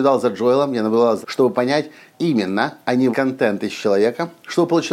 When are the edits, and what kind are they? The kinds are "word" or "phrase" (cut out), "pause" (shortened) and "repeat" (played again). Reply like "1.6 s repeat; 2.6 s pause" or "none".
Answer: 1.2 s word; 2.1 s word; 3.1 s word